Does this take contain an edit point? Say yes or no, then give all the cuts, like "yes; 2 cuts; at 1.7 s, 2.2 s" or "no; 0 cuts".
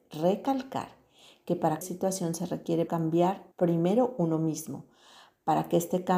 yes; 3 cuts; at 1.8 s, 2.9 s, 3.5 s